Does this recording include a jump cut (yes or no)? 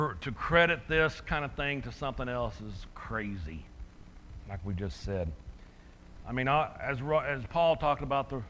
no